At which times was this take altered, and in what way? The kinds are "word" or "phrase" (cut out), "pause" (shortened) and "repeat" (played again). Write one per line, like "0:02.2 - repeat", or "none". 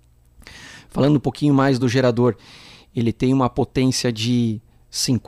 none

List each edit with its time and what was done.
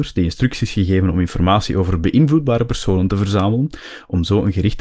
none

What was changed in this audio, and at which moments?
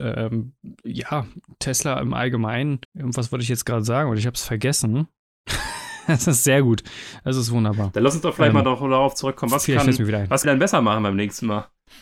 0:02.8 - pause
0:10.4 - phrase

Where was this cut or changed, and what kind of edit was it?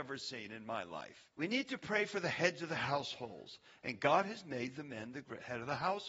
0:01.3 - pause

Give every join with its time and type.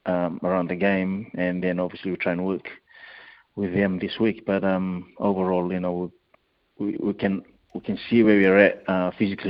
none

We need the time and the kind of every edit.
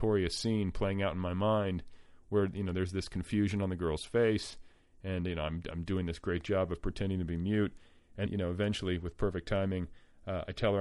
0:08.3 - word

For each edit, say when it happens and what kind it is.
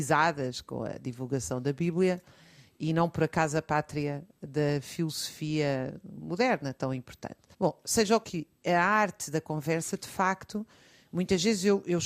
0:07.5 - pause
0:08.2 - phrase

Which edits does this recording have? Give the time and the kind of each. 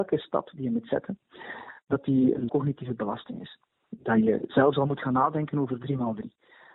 0:02.5 - word

